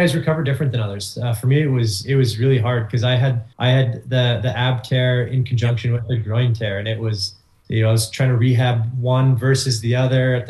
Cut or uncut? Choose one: cut